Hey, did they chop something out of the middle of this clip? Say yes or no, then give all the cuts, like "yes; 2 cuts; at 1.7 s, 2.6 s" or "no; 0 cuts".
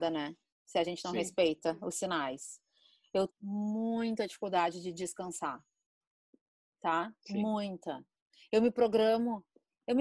yes; 1 cut; at 3.3 s